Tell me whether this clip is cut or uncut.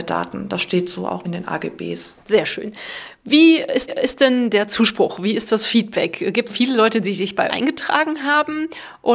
cut